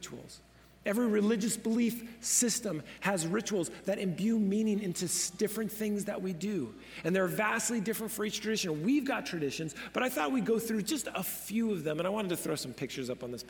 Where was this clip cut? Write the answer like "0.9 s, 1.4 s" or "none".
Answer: none